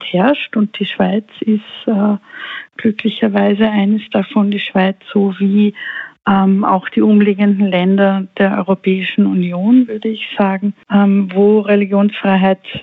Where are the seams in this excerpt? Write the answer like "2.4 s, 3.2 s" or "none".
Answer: none